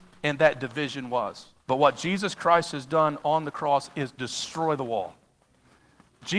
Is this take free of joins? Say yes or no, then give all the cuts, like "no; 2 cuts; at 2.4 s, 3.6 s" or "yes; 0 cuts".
no; 1 cut; at 1.6 s